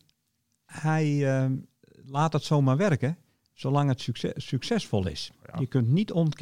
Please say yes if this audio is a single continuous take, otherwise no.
yes